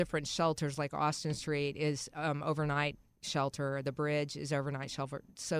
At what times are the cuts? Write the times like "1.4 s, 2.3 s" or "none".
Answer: none